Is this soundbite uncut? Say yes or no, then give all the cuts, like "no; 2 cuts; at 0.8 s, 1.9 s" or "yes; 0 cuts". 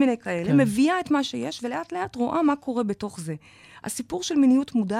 yes; 0 cuts